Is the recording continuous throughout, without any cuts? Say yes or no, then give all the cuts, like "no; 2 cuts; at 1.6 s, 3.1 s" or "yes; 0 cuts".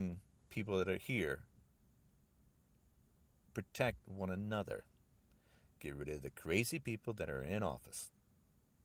yes; 0 cuts